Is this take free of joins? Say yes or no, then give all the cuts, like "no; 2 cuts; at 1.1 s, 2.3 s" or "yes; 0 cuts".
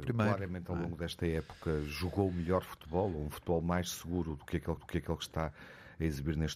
no; 1 cut; at 4.8 s